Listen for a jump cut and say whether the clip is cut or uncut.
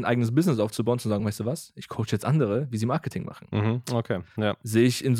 uncut